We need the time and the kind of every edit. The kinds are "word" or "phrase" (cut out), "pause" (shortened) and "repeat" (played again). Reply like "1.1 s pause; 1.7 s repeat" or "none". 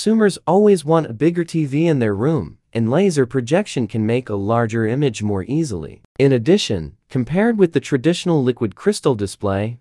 6.1 s pause